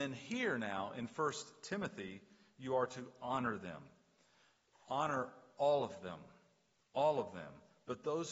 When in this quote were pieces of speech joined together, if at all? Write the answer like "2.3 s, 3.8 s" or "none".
none